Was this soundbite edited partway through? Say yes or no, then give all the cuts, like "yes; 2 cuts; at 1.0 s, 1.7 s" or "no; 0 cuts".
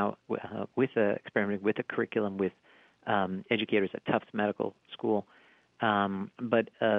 no; 0 cuts